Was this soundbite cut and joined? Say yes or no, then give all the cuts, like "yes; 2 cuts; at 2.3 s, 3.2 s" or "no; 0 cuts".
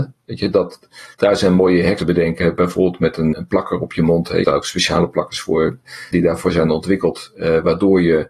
yes; 5 cuts; at 1.1 s, 2.0 s, 3.3 s, 4.4 s, 6.1 s